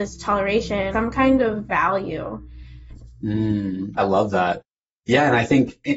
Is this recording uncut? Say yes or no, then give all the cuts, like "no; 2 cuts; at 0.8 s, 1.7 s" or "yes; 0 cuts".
no; 2 cuts; at 0.9 s, 4.0 s